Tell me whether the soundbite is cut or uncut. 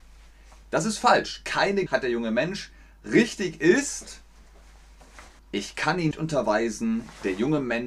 cut